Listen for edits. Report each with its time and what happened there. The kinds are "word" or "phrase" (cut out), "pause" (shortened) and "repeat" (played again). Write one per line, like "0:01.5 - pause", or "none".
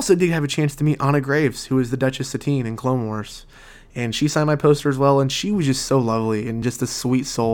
none